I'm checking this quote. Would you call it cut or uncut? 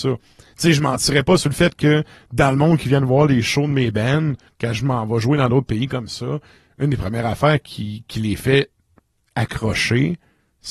uncut